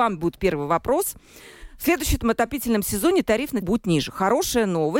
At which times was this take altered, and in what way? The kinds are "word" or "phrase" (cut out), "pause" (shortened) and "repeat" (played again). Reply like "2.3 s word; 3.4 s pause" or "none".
3.6 s word